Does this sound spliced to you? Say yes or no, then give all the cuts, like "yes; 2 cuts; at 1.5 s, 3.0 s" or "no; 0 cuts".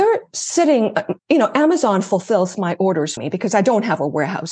yes; 2 cuts; at 1.2 s, 3.2 s